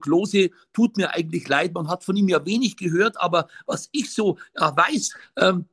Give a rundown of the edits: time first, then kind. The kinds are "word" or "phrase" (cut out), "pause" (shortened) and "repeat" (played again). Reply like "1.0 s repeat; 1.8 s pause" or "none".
none

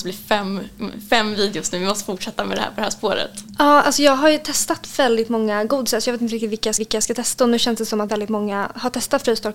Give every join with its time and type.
6.8 s repeat; 8.1 s word

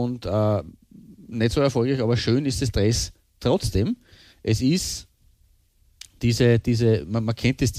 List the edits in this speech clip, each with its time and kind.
none

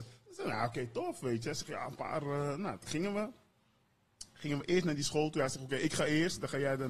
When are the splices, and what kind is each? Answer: none

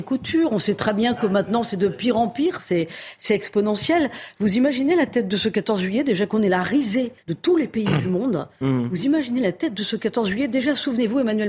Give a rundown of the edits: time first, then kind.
7.2 s pause

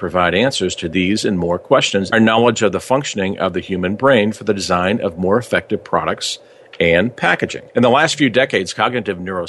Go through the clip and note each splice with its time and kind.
2.1 s phrase; 7.7 s pause

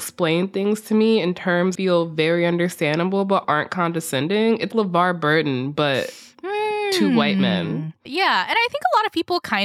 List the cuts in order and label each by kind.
1.8 s word; 3.4 s word; 4.7 s word; 8.1 s word

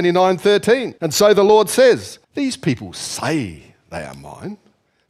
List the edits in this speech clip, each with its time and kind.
1.0 s pause; 2.2 s pause

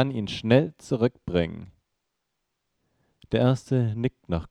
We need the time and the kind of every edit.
none

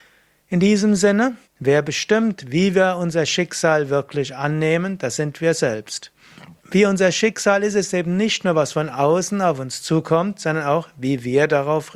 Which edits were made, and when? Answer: 1.4 s pause; 6.6 s pause

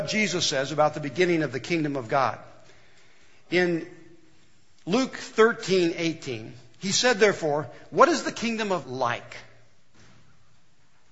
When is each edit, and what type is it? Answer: 8.8 s word

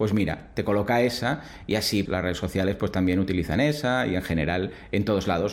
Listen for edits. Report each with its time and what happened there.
2.1 s word

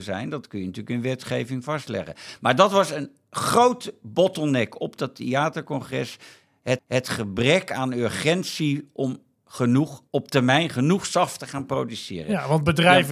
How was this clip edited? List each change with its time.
6.8 s repeat; 10.1 s pause

